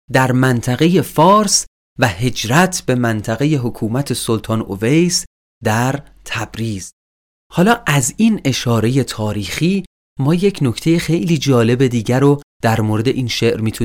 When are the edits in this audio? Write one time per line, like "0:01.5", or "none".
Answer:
none